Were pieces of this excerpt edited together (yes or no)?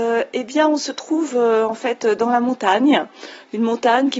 no